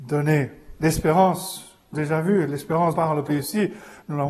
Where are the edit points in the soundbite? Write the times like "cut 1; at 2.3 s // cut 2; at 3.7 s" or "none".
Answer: cut 1; at 1.9 s // cut 2; at 2.9 s // cut 3; at 3.3 s